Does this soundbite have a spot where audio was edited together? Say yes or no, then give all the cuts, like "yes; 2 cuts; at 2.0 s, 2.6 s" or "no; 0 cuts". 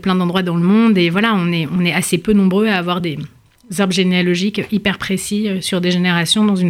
no; 0 cuts